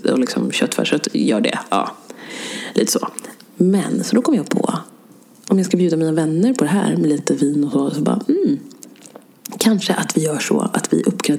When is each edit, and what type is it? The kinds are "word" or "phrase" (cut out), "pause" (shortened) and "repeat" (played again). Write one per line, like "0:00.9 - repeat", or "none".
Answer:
none